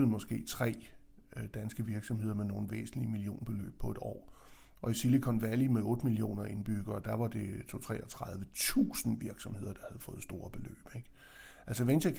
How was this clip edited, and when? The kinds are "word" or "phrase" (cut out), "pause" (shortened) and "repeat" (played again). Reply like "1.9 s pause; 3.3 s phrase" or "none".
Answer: none